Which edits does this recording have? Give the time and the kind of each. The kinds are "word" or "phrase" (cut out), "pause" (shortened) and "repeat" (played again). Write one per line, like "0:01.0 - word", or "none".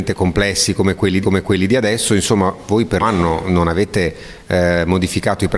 0:01.2 - repeat
0:03.0 - word

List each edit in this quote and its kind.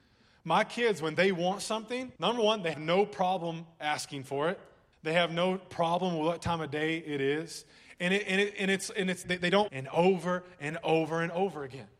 0:02.2 - pause
0:02.7 - word
0:04.9 - pause
0:09.2 - word
0:09.7 - phrase

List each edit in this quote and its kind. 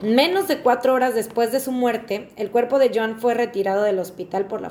none

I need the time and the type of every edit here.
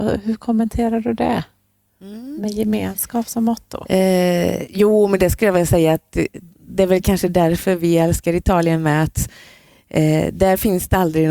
none

